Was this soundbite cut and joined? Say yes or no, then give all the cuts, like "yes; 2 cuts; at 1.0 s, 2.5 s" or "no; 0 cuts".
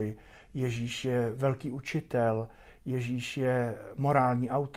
no; 0 cuts